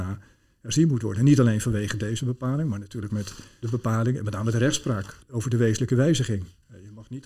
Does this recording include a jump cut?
yes; 1 cut; at 3.1 s

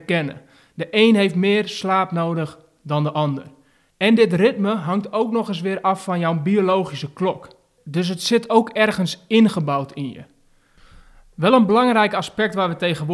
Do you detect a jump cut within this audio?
no; 0 cuts

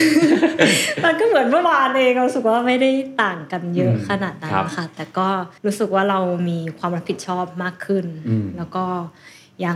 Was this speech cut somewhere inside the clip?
yes; 1 cut; at 5.6 s

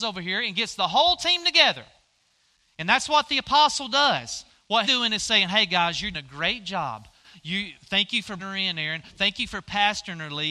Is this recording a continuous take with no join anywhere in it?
no; 3 cuts; at 4.8 s, 6.1 s, 8.4 s

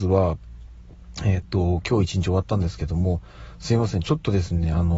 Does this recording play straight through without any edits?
yes; 0 cuts

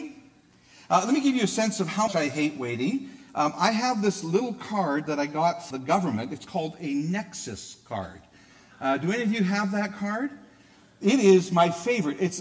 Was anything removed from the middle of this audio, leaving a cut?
yes; 2 cuts; at 2.1 s, 5.7 s

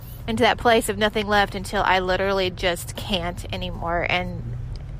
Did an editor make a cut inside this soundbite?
no; 0 cuts

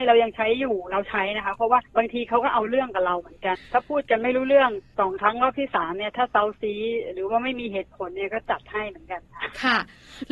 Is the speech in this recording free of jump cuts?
no; 1 cut; at 1.9 s

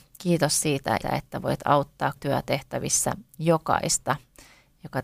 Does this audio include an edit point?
yes; 2 cuts; at 1.0 s, 2.2 s

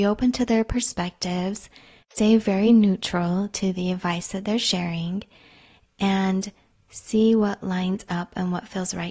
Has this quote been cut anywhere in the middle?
no; 0 cuts

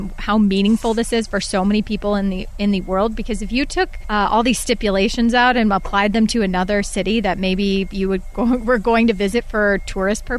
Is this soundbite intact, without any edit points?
yes; 0 cuts

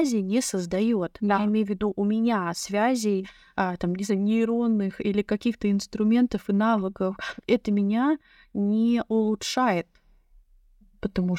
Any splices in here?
no; 0 cuts

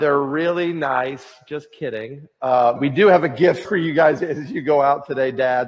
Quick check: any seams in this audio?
yes; 3 cuts; at 2.8 s, 3.6 s, 4.2 s

